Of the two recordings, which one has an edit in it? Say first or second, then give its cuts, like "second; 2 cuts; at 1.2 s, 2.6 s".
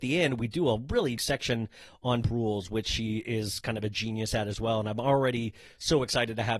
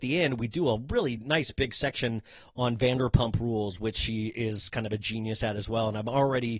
first; 2 cuts; at 1.2 s, 2.2 s